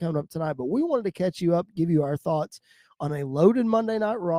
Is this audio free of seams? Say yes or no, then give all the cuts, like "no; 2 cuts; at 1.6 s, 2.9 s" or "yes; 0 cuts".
yes; 0 cuts